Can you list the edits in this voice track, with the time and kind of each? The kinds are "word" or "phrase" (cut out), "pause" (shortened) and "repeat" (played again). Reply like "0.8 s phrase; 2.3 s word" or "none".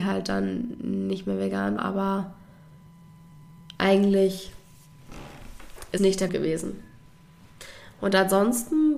1.8 s word; 3.7 s pause; 6.0 s word; 6.3 s word